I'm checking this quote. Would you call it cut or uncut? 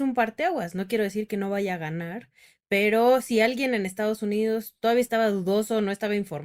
uncut